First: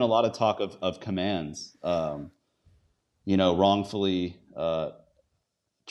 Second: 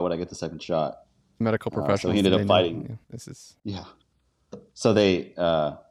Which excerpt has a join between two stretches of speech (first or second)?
second